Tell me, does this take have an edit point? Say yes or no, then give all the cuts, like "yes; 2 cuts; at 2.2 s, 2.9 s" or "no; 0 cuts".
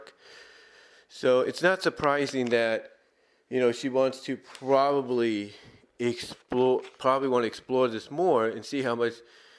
no; 0 cuts